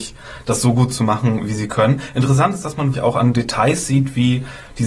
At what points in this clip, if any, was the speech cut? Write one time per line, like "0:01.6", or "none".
0:02.9